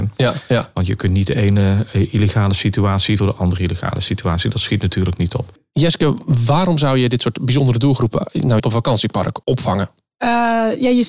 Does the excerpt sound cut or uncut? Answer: cut